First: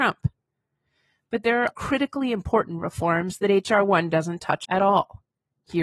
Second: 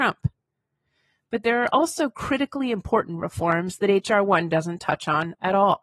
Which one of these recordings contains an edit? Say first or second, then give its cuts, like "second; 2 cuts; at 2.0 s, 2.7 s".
first; 2 cuts; at 1.7 s, 4.7 s